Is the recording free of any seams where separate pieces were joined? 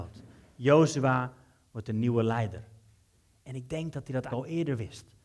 no; 1 cut; at 4.3 s

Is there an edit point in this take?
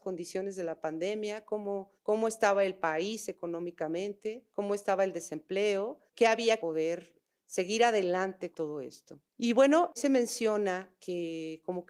yes; 7 cuts; at 2.0 s, 4.5 s, 6.1 s, 6.6 s, 8.5 s, 9.3 s, 10.0 s

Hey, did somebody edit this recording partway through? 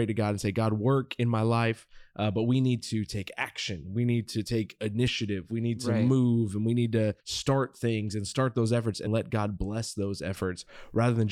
yes; 2 cuts; at 7.2 s, 9.1 s

